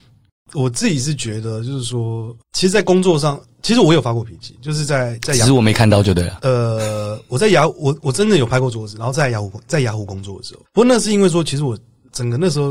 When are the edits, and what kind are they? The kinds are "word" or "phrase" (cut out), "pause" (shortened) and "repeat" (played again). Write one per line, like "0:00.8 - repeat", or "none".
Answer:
0:10.6 - pause